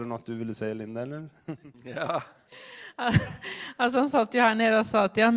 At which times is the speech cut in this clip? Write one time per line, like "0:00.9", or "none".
none